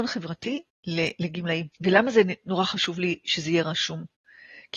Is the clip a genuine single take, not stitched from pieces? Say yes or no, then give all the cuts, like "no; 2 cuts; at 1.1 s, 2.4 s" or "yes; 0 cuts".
no; 1 cut; at 1.7 s